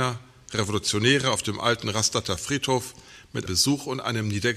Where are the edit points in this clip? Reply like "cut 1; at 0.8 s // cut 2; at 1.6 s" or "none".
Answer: cut 1; at 3.5 s